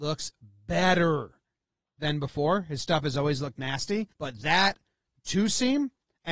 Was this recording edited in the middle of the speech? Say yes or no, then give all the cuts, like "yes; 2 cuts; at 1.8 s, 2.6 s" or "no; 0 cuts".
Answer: yes; 1 cut; at 4.1 s